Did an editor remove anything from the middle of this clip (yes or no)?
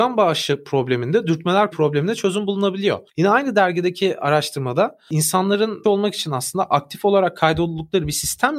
yes